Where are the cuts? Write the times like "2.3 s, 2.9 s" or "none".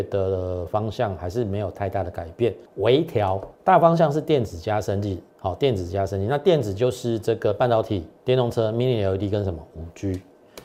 2.7 s, 3.5 s, 5.3 s, 8.2 s